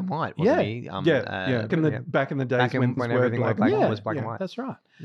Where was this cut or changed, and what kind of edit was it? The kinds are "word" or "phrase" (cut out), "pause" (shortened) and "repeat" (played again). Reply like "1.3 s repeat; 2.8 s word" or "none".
1.7 s word; 3.0 s word